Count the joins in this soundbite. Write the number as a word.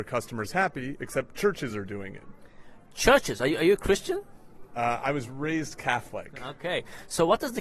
zero